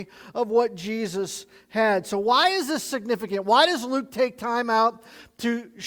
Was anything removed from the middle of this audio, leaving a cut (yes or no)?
no